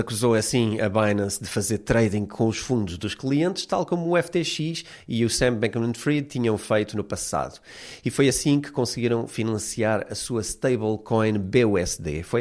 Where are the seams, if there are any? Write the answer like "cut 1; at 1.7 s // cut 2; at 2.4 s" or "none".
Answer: none